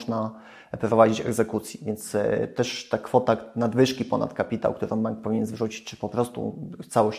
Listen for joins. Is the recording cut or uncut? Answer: uncut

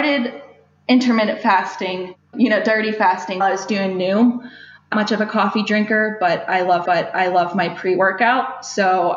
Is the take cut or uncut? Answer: cut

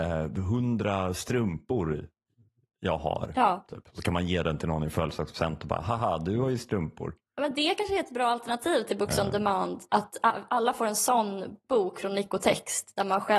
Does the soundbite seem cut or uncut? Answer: uncut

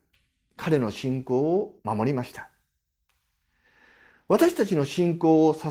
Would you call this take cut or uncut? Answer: cut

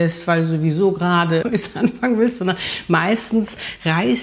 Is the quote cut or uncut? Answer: cut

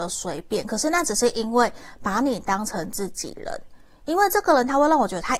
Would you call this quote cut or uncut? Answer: uncut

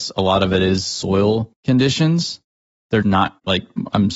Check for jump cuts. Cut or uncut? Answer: cut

